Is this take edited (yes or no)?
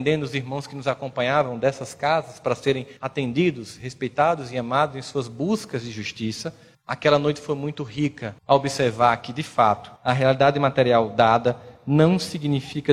yes